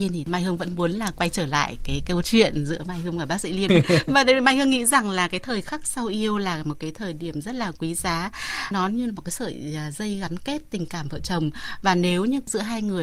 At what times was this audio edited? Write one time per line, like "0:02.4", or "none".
0:08.7